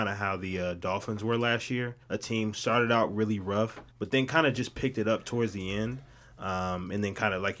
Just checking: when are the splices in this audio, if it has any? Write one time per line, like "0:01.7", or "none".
0:02.0
0:02.5
0:03.9